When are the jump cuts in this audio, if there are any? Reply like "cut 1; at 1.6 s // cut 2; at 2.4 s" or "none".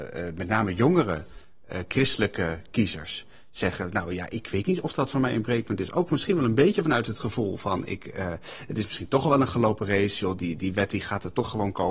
none